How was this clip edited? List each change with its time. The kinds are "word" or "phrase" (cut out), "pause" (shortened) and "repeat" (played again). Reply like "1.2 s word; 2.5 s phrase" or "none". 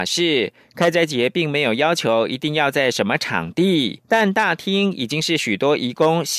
4.0 s pause